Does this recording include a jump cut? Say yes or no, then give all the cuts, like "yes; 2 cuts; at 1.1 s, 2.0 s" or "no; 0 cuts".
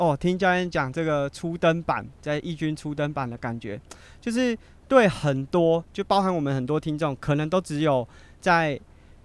no; 0 cuts